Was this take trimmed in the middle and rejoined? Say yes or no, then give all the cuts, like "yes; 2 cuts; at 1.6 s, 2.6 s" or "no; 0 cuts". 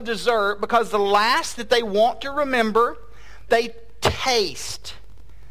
yes; 2 cuts; at 1.6 s, 3.5 s